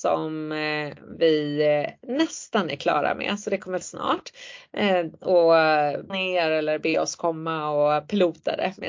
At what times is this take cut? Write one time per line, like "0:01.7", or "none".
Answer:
0:03.8
0:06.1